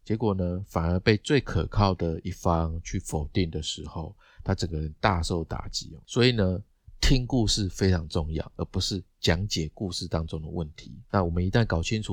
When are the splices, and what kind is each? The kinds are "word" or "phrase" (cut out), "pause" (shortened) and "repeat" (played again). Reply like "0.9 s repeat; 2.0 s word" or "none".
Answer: 11.0 s pause